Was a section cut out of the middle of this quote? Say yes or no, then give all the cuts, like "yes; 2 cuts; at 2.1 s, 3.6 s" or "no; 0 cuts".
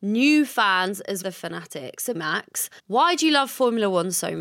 yes; 3 cuts; at 1.2 s, 2.1 s, 2.8 s